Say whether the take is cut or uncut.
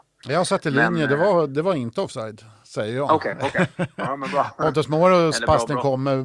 uncut